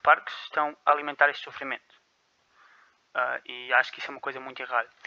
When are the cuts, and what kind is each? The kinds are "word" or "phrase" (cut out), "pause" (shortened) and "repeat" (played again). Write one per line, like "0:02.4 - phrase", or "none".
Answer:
none